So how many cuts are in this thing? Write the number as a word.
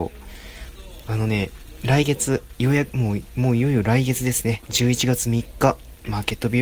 zero